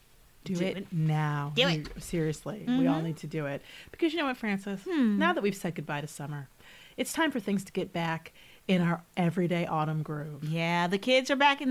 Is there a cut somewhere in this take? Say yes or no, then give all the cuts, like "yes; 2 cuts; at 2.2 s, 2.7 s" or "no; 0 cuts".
no; 0 cuts